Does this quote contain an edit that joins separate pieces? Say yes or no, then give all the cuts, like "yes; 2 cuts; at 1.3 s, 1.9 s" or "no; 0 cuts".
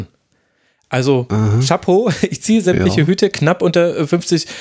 no; 0 cuts